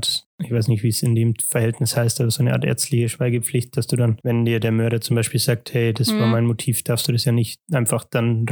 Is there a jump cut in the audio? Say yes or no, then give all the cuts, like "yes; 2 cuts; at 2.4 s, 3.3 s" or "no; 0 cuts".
no; 0 cuts